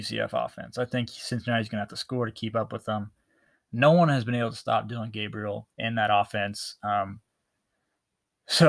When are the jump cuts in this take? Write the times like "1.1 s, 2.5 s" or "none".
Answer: 5.7 s